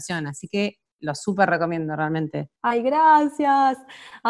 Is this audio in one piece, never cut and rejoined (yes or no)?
no